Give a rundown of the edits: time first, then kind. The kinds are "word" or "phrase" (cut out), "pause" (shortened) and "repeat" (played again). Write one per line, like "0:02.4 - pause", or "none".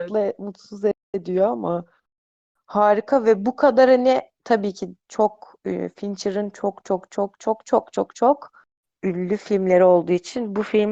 0:01.0 - pause

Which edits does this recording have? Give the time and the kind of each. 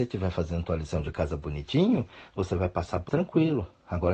0:03.1 - word

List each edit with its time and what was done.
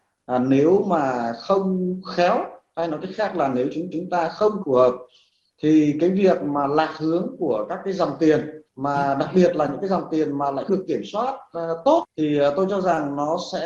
0:03.9 - repeat
0:04.6 - phrase
0:08.7 - pause
0:10.7 - word

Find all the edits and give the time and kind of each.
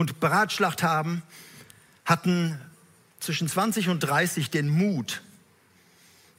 none

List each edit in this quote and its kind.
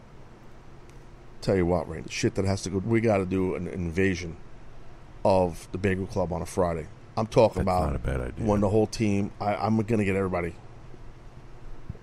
0:02.0 - word
0:02.8 - word

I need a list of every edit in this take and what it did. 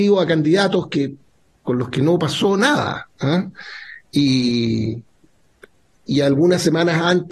none

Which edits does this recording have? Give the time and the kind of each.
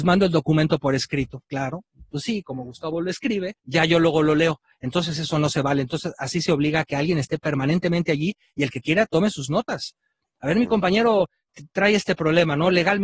0:03.6 - pause

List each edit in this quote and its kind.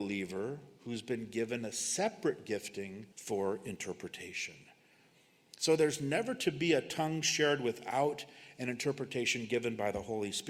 0:03.1 - pause

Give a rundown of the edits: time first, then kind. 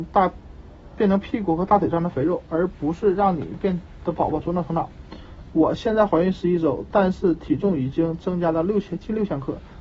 none

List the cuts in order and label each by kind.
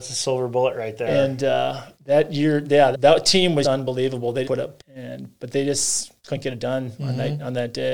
0:01.9 - pause
0:02.9 - word
0:03.6 - word
0:04.4 - word
0:04.8 - word
0:06.2 - pause

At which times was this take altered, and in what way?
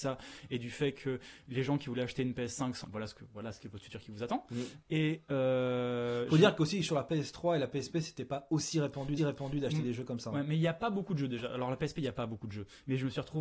0:02.8 - phrase
0:09.2 - repeat

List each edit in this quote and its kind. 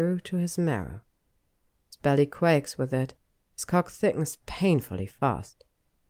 none

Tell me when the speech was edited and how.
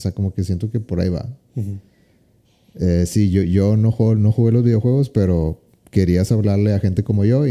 none

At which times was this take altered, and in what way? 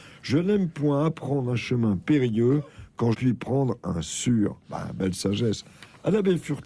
0:03.1 - word

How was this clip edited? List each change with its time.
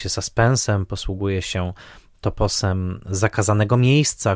none

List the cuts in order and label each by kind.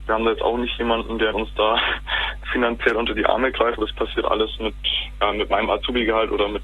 0:01.3 - word
0:03.8 - word

